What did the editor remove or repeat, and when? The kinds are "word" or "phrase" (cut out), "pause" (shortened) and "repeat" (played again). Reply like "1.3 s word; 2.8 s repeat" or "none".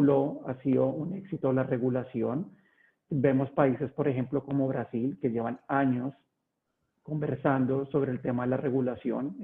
none